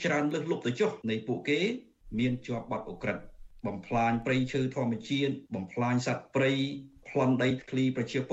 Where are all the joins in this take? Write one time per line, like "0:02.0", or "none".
0:01.0
0:05.5